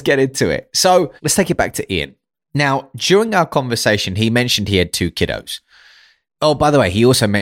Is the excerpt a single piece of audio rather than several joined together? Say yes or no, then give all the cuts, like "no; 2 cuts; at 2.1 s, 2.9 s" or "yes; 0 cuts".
no; 1 cut; at 1.2 s